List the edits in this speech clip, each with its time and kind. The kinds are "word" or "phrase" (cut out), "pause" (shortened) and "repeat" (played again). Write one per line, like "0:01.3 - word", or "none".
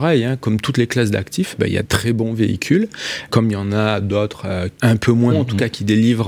0:01.8 - word
0:03.3 - word
0:04.7 - pause
0:05.3 - word